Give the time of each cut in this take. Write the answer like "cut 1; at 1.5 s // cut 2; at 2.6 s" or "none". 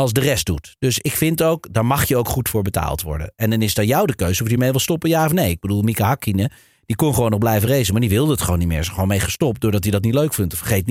none